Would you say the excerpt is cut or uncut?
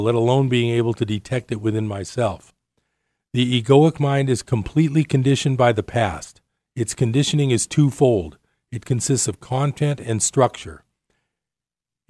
uncut